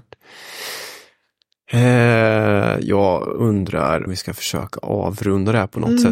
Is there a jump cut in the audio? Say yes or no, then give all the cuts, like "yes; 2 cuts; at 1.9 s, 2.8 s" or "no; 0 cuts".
yes; 1 cut; at 4.1 s